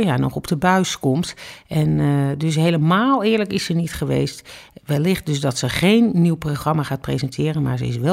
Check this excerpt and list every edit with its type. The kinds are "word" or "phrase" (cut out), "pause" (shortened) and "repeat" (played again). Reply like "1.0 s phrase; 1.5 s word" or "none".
none